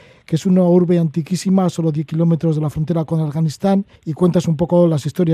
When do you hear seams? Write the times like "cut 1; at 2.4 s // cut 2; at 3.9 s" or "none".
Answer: cut 1; at 4.0 s